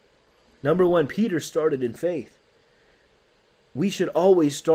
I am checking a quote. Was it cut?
no; 0 cuts

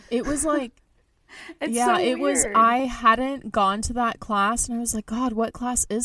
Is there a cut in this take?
no; 0 cuts

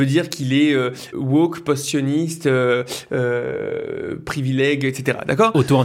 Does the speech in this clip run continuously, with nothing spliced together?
no; 1 cut; at 1.1 s

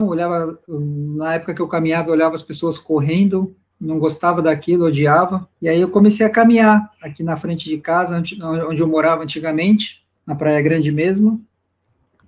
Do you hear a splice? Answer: yes; 3 cuts; at 3.7 s, 5.5 s, 10.1 s

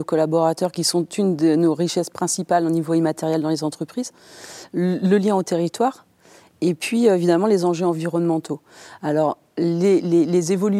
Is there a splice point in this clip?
no; 0 cuts

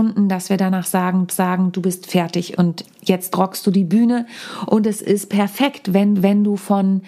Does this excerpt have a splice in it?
yes; 3 cuts; at 1.3 s, 2.8 s, 6.2 s

